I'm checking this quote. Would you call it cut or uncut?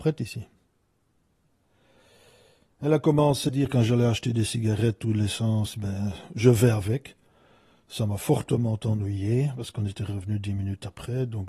cut